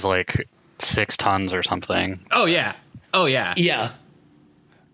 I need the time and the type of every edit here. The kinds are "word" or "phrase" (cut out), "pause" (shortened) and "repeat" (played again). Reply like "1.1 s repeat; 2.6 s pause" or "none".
3.0 s pause